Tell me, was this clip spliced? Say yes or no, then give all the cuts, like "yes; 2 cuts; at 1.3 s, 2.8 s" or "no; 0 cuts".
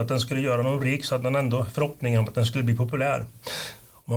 no; 0 cuts